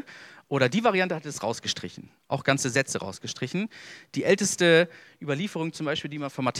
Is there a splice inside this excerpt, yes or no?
no